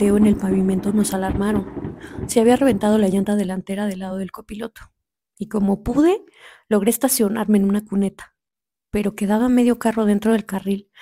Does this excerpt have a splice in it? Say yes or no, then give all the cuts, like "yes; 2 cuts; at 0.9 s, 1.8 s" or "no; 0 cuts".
no; 0 cuts